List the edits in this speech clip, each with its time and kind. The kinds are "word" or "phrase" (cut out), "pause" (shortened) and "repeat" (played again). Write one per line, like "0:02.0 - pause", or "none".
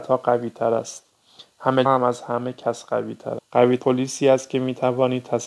0:01.9 - word
0:03.4 - word
0:03.8 - word